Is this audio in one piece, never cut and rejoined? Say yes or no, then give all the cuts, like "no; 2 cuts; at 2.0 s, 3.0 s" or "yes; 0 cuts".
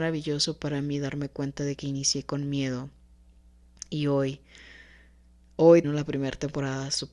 no; 1 cut; at 5.8 s